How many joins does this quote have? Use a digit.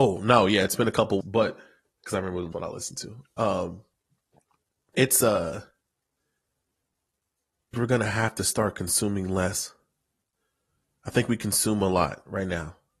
4